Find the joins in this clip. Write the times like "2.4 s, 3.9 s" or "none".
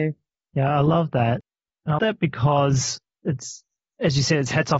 2.0 s